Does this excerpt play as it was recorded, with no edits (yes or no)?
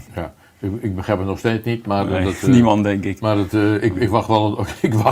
yes